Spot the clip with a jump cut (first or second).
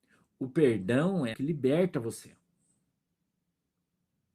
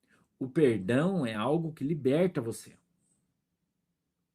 first